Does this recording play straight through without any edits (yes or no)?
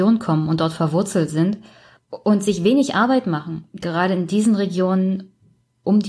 yes